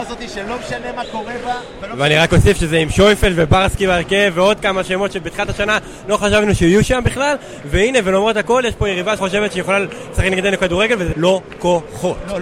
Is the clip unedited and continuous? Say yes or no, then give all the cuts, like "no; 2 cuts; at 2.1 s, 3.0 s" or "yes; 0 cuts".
no; 2 cuts; at 9.2 s, 11.1 s